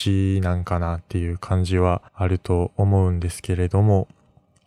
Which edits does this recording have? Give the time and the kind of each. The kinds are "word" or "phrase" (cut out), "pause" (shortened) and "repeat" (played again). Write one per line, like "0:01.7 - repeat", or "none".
0:02.1 - pause